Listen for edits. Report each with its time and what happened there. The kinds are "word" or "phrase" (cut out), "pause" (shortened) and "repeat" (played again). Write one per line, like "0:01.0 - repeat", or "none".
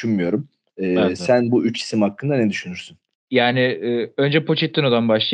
0:03.1 - pause